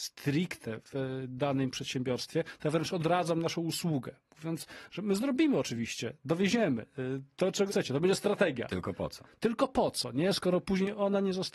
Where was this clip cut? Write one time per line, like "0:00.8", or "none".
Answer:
0:07.7